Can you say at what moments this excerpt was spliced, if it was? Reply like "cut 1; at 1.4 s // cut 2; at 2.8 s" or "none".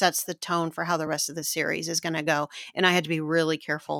none